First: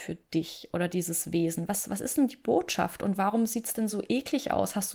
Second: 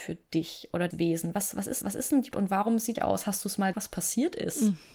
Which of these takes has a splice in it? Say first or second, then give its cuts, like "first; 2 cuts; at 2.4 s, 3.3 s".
second; 5 cuts; at 0.9 s, 1.8 s, 2.3 s, 3.0 s, 3.7 s